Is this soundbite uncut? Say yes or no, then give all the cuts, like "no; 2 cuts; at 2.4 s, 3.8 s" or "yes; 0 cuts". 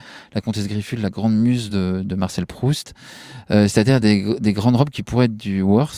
yes; 0 cuts